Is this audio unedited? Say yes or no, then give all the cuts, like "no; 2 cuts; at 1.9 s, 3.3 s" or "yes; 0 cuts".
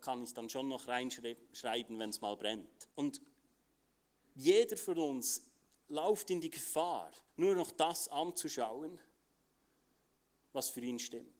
no; 2 cuts; at 2.9 s, 7.3 s